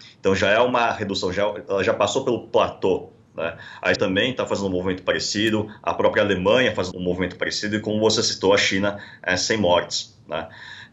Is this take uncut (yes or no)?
no